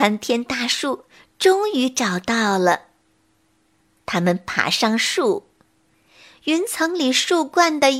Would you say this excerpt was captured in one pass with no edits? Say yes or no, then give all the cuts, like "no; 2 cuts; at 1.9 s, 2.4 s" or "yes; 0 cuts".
yes; 0 cuts